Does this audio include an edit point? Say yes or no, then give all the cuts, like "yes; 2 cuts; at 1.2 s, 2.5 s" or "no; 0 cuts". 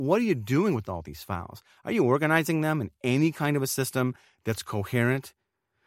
no; 0 cuts